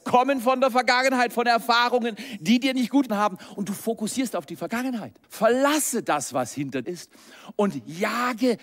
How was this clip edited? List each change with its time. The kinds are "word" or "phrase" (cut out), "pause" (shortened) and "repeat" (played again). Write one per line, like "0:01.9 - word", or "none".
0:03.1 - word
0:05.2 - pause
0:06.8 - word